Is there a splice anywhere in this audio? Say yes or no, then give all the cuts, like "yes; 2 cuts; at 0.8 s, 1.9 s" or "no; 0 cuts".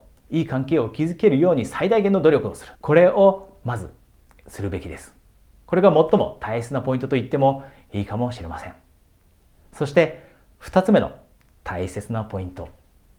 yes; 1 cut; at 2.7 s